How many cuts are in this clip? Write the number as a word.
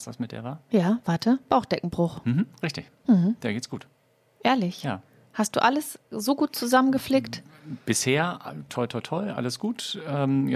zero